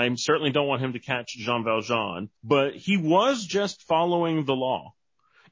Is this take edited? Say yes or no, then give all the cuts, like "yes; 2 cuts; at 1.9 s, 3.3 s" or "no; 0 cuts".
yes; 1 cut; at 2.4 s